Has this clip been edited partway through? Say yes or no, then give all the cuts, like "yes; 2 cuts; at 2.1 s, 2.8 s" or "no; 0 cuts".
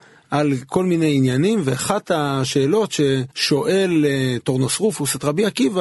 yes; 1 cut; at 3.3 s